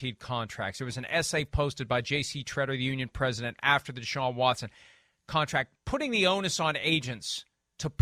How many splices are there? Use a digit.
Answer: 0